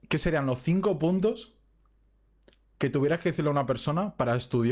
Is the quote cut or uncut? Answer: uncut